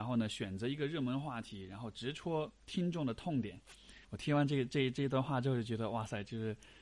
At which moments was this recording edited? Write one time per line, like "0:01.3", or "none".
0:04.0